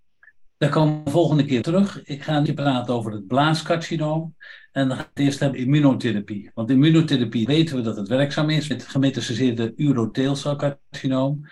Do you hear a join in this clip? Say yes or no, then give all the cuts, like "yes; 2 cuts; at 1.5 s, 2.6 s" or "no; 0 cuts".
yes; 7 cuts; at 1.1 s, 1.6 s, 2.5 s, 5.2 s, 5.5 s, 7.5 s, 8.7 s